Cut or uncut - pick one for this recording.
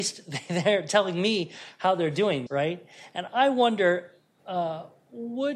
cut